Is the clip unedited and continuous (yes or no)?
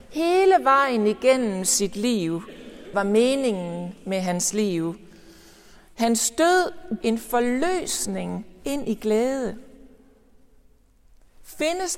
no